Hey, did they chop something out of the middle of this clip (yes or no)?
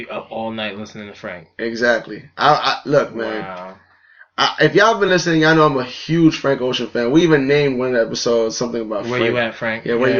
no